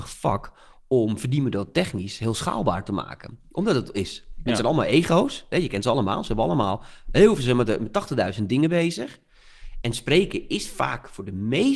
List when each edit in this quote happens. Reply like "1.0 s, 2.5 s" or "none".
3.9 s